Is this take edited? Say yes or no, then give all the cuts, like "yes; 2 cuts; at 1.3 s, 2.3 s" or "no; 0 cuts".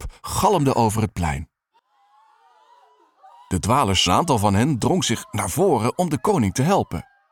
yes; 1 cut; at 4.1 s